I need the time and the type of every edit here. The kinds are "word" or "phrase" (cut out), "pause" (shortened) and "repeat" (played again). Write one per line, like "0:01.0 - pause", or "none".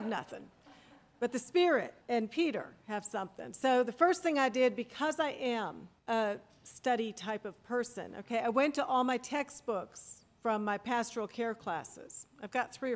0:02.0 - pause
0:06.0 - pause